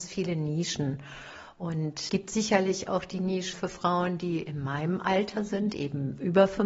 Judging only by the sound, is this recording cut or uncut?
cut